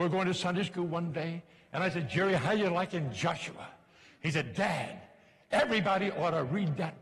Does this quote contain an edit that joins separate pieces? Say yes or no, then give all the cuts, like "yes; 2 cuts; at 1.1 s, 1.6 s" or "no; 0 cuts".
no; 0 cuts